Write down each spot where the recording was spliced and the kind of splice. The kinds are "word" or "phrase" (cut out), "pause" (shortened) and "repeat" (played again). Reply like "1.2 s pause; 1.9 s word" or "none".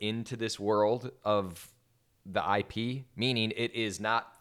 none